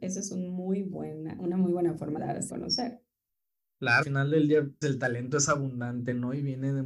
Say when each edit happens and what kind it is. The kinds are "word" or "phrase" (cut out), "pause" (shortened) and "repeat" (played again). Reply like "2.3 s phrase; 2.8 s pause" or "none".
2.2 s word; 2.5 s word; 4.0 s word; 4.8 s word